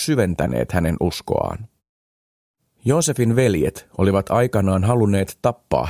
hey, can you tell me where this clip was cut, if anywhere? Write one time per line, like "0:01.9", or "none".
none